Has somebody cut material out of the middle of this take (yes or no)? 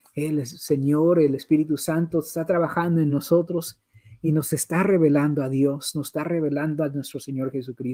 no